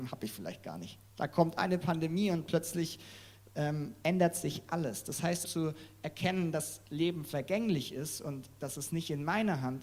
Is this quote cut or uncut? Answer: cut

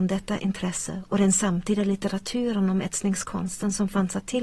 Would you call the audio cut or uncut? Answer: uncut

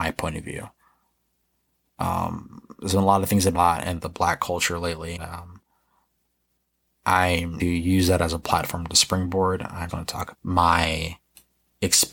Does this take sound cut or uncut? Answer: cut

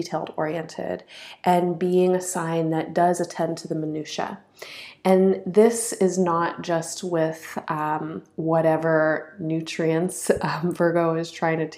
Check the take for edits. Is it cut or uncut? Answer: uncut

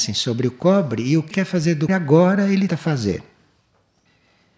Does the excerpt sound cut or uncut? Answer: cut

